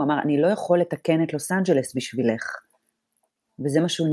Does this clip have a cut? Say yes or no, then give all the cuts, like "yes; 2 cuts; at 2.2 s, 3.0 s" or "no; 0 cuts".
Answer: no; 0 cuts